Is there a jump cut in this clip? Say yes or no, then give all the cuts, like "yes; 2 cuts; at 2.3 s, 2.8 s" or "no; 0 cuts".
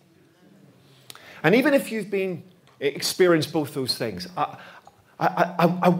no; 0 cuts